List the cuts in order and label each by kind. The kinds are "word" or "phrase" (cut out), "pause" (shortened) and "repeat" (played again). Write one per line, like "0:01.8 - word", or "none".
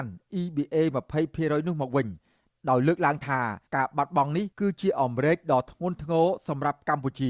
0:03.7 - pause
0:04.5 - pause